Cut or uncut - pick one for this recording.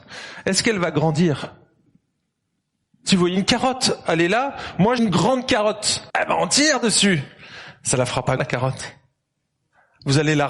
cut